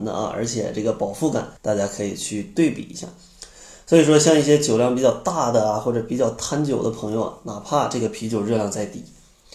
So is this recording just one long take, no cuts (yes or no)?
no